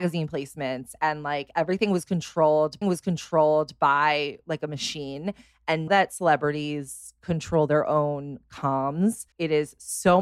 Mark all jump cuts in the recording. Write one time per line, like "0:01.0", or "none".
0:02.8
0:05.9
0:09.3